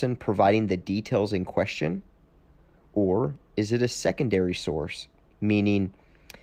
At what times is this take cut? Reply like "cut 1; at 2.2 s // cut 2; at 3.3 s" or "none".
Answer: none